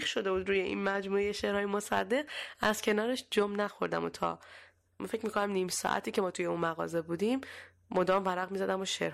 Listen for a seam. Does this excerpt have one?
no; 0 cuts

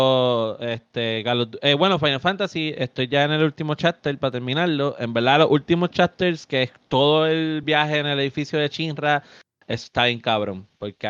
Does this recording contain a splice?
no; 0 cuts

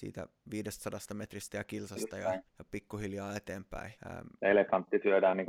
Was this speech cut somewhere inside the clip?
yes; 2 cuts; at 2.5 s, 4.0 s

